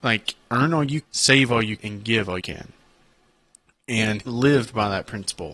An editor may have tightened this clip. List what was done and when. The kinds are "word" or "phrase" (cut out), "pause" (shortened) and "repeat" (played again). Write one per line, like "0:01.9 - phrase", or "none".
0:01.0 - word
0:01.8 - word
0:02.4 - word
0:04.2 - word